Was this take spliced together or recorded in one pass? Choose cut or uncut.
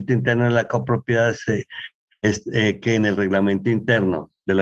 uncut